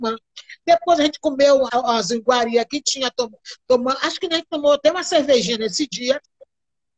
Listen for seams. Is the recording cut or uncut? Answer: cut